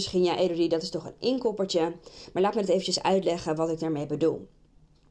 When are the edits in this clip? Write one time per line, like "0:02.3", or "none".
none